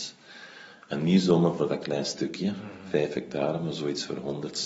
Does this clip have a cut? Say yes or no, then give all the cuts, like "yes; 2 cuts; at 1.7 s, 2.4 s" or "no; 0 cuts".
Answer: no; 0 cuts